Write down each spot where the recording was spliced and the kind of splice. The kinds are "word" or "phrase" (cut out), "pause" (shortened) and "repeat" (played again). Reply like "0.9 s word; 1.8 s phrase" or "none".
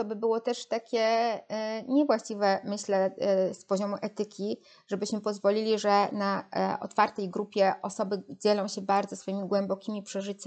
none